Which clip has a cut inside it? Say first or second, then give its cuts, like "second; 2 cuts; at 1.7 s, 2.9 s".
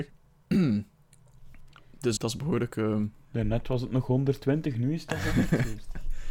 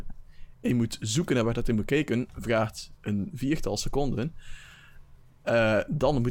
first; 1 cut; at 2.2 s